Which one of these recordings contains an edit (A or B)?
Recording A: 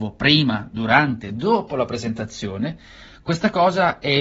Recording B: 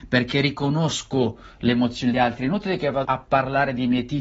B